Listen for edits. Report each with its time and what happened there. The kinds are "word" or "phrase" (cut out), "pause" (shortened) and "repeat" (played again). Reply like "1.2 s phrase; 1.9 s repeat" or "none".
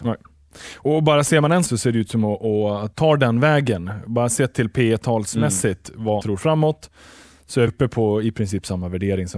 1.7 s word; 2.9 s word; 6.2 s word; 7.7 s word

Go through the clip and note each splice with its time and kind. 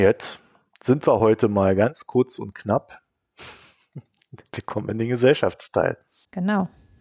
none

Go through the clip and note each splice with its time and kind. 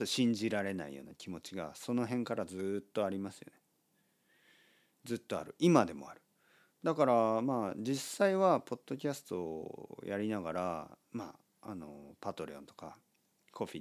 none

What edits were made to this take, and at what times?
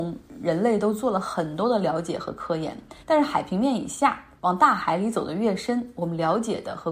3.0 s pause

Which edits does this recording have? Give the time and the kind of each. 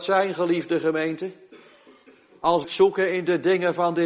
2.6 s word

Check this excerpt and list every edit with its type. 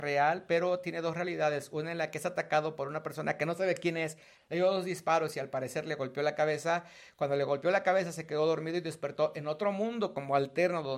none

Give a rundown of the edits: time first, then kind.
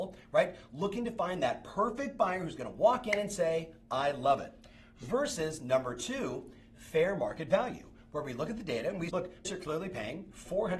9.1 s word; 9.4 s word

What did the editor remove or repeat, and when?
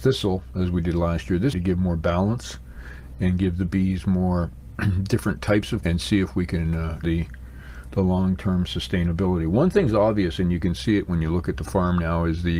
1.5 s phrase; 5.8 s word; 7.0 s phrase

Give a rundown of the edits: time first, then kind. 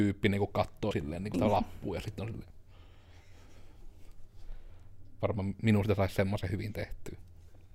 0.9 s word; 1.3 s phrase

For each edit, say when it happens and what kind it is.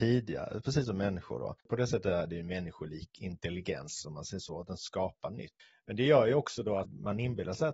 5.6 s pause

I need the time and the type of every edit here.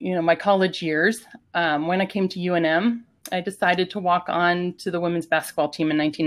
none

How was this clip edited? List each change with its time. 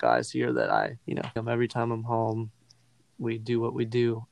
1.0 s pause; 1.4 s word

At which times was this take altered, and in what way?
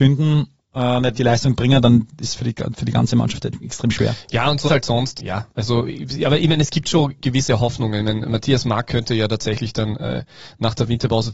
1.1 s word; 4.7 s word; 5.2 s word

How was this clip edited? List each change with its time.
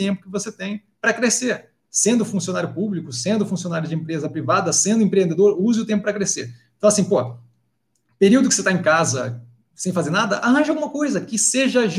none

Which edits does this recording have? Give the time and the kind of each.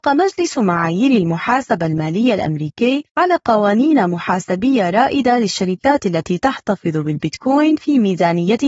3.1 s pause

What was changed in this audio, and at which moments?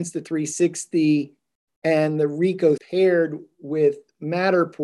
1.7 s pause; 2.8 s word

